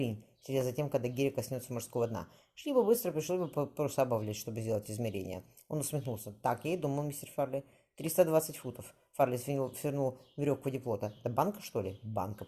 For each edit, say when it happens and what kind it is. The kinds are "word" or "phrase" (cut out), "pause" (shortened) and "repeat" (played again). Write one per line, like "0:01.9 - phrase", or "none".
none